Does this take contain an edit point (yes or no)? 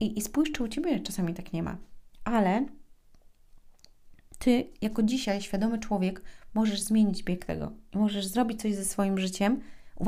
no